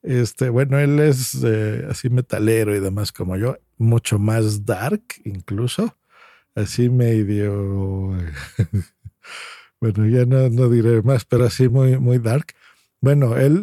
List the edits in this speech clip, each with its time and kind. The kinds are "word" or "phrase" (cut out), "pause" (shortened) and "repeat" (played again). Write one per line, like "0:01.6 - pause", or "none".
none

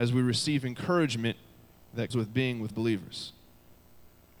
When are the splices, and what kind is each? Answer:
0:02.1 - word
0:02.7 - word

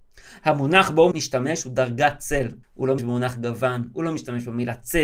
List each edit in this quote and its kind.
0:01.1 - word
0:02.6 - pause
0:03.0 - word

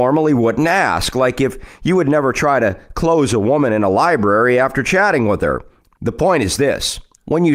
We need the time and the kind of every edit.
none

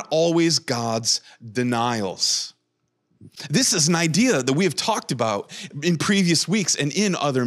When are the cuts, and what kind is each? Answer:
none

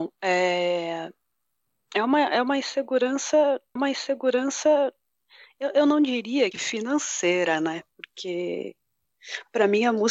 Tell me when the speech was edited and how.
0:03.8 - repeat
0:06.5 - phrase

